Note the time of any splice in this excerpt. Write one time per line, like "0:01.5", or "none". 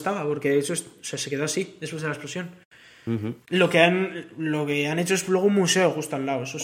0:03.4